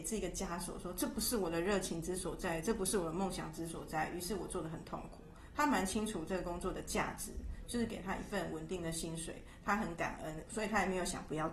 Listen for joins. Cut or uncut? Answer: uncut